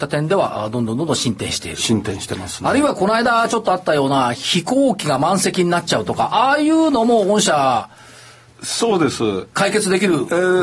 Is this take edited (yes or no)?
no